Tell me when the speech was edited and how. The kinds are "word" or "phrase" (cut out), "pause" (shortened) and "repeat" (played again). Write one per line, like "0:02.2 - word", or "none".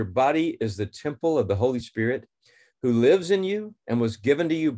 none